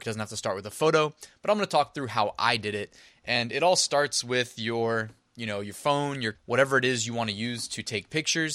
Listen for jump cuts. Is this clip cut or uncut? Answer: cut